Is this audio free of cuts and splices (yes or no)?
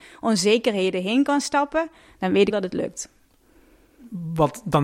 no